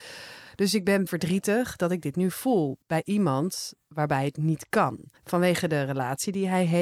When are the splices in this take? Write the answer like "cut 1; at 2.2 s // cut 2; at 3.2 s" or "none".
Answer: cut 1; at 1.1 s // cut 2; at 2.8 s // cut 3; at 5.2 s